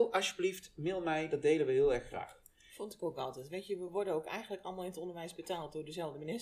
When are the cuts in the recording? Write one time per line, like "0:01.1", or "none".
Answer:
none

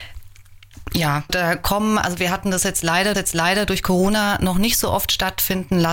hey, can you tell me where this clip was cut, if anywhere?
0:01.3
0:03.1

